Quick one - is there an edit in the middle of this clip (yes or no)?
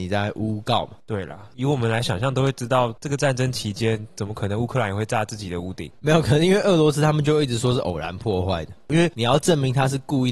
yes